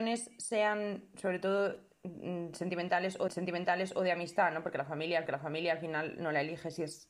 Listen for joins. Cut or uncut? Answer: cut